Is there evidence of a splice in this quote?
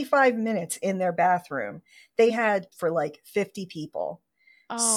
yes; 2 cuts; at 2.3 s, 2.7 s

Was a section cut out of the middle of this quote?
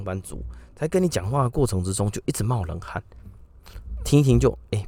no; 0 cuts

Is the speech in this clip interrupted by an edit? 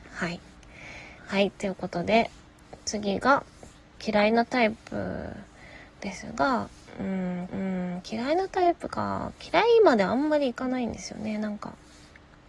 yes; 3 cuts; at 1.2 s, 4.0 s, 7.5 s

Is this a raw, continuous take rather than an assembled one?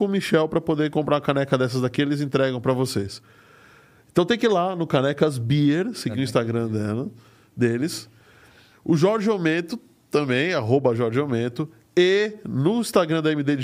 yes; 0 cuts

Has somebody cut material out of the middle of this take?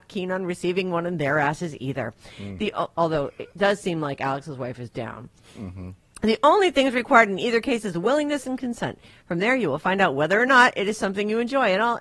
no; 0 cuts

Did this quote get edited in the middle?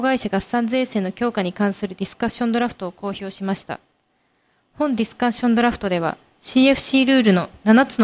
no; 0 cuts

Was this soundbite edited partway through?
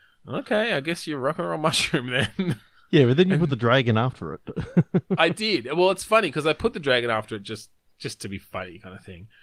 no; 0 cuts

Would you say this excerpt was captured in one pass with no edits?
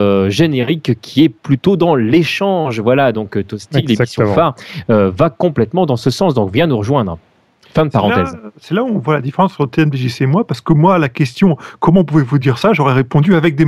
yes; 0 cuts

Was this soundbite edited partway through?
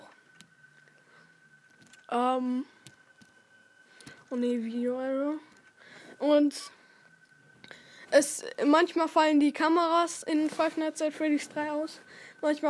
no; 0 cuts

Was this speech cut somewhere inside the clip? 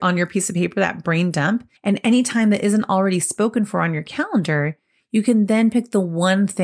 yes; 1 cut; at 1.8 s

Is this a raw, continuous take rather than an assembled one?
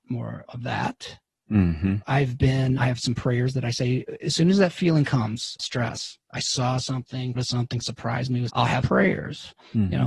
no; 6 cuts; at 2.8 s, 5.6 s, 7.3 s, 7.8 s, 8.5 s, 8.8 s

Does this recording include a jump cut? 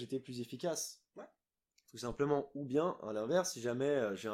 no; 0 cuts

